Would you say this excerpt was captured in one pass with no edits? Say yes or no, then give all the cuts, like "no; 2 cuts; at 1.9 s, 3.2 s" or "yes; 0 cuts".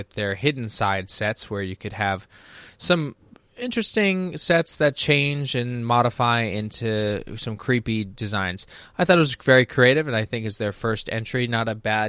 yes; 0 cuts